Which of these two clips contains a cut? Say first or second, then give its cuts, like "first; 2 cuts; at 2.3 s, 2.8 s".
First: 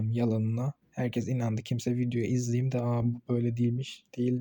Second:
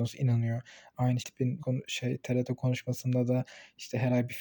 second; 2 cuts; at 1.2 s, 1.6 s